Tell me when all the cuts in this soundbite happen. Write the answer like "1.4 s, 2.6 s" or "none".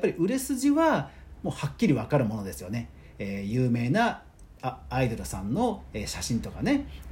4.5 s